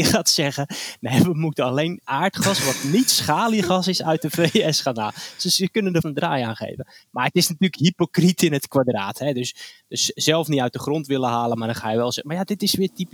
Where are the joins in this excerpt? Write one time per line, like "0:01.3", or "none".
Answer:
0:02.0
0:06.0